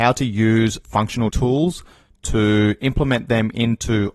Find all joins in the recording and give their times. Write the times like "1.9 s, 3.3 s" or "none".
1.3 s